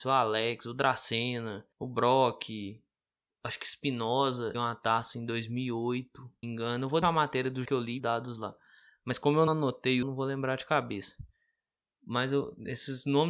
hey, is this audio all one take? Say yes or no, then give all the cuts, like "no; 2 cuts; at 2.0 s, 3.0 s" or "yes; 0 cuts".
no; 9 cuts; at 1.7 s, 3.2 s, 4.5 s, 6.4 s, 7.0 s, 7.6 s, 8.0 s, 9.5 s, 10.0 s